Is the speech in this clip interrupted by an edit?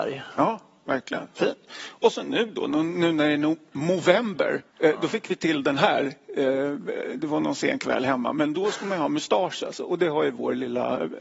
yes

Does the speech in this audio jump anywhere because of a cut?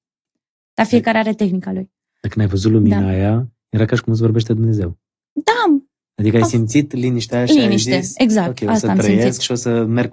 no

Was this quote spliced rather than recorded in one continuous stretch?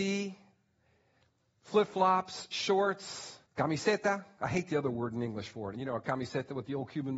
yes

